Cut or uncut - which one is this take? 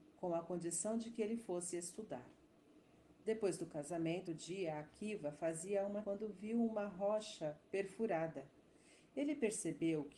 cut